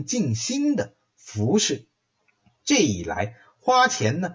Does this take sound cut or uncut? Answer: cut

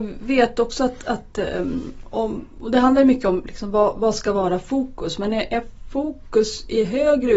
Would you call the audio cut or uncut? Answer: uncut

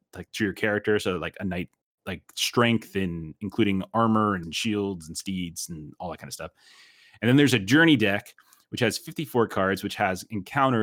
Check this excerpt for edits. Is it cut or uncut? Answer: cut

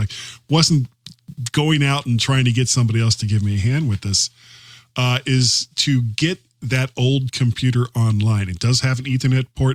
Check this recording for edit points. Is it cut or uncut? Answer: uncut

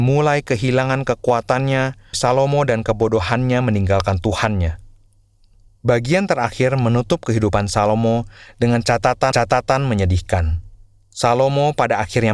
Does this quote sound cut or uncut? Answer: cut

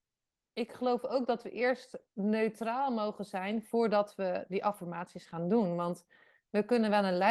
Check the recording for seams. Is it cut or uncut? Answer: cut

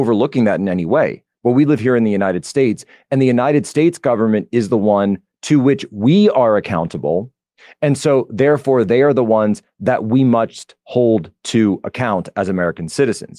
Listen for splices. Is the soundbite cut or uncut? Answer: uncut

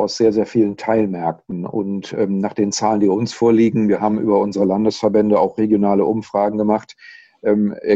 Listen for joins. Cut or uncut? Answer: uncut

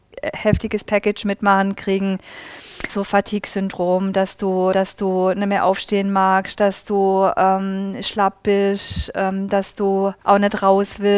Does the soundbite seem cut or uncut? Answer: cut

